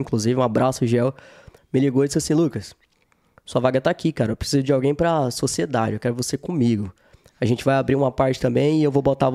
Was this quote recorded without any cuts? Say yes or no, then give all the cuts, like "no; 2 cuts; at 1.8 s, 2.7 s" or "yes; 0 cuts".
yes; 0 cuts